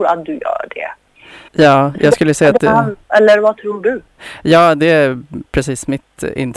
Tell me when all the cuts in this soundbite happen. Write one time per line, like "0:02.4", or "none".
0:01.5
0:03.0